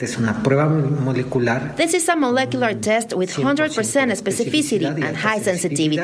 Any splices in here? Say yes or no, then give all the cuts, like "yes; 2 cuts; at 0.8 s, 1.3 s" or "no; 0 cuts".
no; 0 cuts